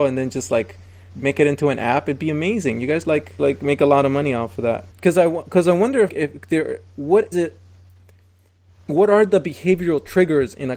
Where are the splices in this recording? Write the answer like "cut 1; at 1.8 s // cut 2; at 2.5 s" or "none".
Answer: cut 1; at 1.1 s // cut 2; at 3.0 s // cut 3; at 3.4 s // cut 4; at 4.9 s // cut 5; at 6.1 s // cut 6; at 7.3 s